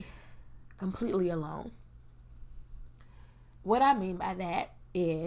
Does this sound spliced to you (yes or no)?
no